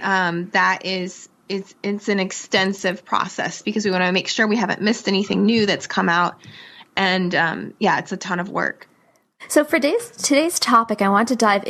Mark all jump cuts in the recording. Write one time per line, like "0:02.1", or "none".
none